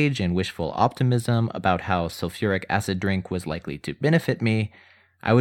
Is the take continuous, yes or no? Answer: yes